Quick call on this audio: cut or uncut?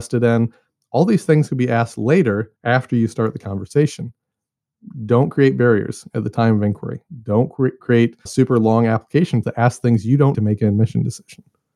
cut